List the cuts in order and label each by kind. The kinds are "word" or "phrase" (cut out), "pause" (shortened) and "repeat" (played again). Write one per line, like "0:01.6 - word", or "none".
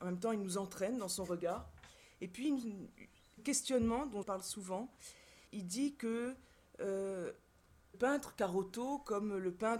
0:03.4 - word
0:04.2 - word
0:05.5 - word
0:07.9 - word